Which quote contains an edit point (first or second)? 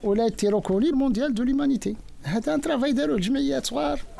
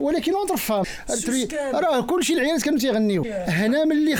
first